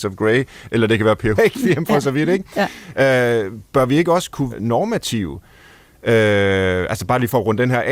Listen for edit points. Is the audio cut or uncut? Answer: cut